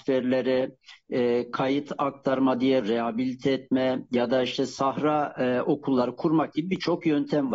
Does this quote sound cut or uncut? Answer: cut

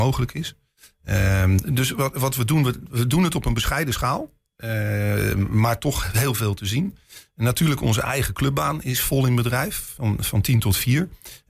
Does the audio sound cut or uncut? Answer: uncut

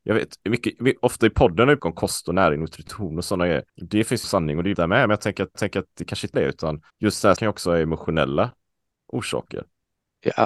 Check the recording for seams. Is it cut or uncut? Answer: cut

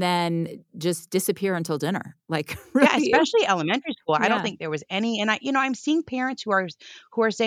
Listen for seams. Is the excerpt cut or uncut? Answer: cut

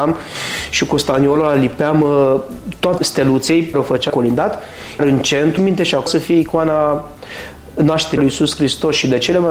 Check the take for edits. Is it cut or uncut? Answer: cut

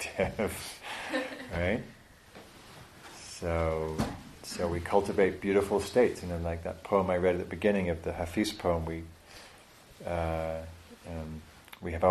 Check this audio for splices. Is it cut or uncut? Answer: cut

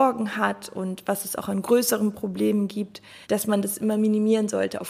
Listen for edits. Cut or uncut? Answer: cut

